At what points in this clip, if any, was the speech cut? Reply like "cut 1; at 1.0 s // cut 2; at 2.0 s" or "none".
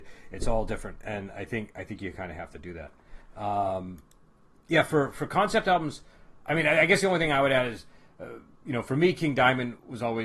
none